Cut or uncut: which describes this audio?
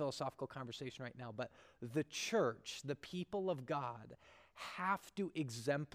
uncut